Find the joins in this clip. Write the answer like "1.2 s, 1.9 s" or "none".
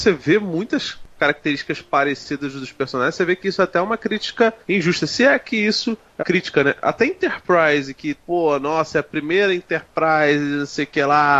4.6 s, 6.2 s